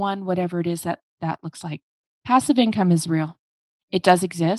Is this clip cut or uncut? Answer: cut